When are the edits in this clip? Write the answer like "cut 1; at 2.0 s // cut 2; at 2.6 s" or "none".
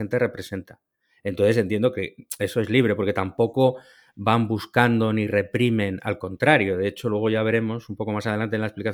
none